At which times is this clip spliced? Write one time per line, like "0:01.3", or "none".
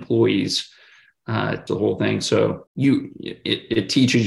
0:01.7
0:02.7